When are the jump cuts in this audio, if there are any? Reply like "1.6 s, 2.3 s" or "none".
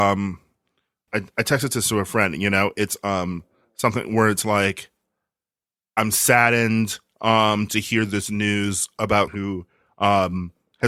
1.1 s, 9.3 s

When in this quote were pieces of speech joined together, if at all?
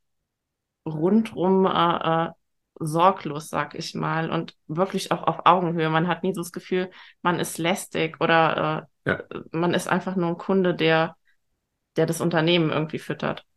none

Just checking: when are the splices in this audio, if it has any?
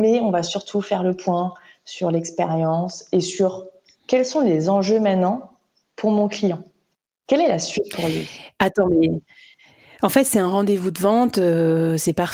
none

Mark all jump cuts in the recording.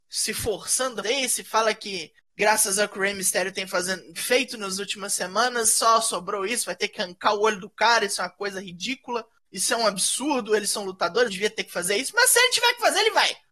1.0 s, 4.2 s, 11.3 s

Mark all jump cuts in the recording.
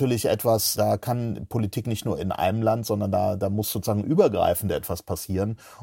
none

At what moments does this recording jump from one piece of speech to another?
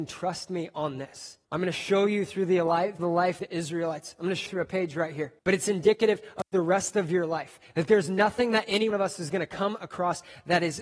1.4 s, 3.0 s, 3.4 s, 4.5 s, 5.4 s, 8.9 s

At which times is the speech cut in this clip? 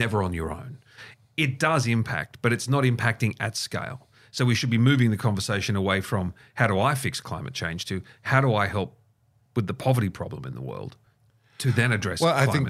none

